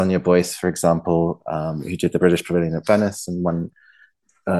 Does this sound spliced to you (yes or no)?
no